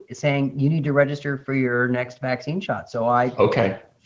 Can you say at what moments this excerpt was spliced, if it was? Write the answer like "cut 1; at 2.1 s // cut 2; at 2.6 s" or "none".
none